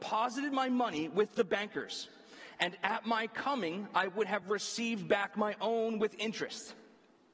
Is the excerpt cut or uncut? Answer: uncut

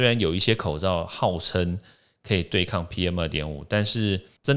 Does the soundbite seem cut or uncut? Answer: uncut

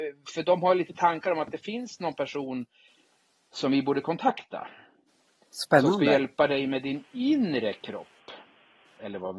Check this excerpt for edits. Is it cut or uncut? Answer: uncut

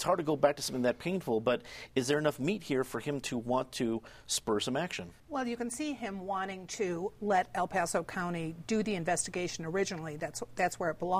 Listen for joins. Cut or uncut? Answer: cut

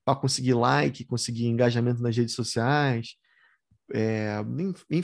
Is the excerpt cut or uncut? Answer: uncut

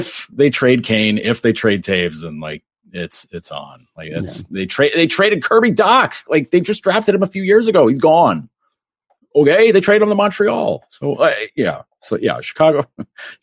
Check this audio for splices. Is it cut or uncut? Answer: uncut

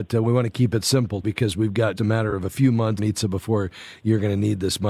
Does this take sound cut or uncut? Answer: cut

